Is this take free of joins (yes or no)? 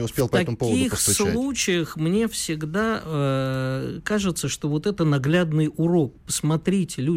yes